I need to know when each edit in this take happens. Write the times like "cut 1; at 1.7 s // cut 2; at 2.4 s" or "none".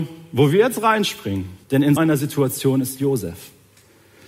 cut 1; at 1.6 s // cut 2; at 2.0 s